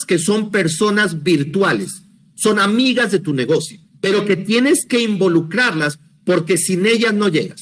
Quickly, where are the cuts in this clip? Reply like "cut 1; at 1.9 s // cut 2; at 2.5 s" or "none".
cut 1; at 3.9 s